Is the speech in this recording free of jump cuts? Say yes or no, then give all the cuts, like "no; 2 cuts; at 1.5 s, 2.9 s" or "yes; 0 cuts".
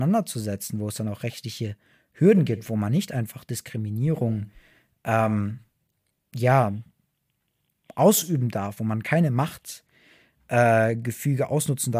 yes; 0 cuts